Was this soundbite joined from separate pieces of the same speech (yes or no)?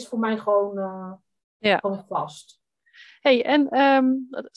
no